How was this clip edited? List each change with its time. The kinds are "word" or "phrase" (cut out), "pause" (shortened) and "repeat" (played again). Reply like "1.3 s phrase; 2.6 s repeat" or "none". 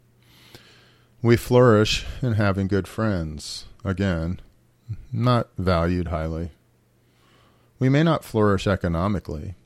none